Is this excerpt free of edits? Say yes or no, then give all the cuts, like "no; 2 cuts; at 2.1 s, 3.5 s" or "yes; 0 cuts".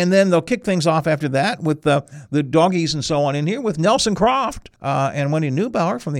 no; 1 cut; at 4.8 s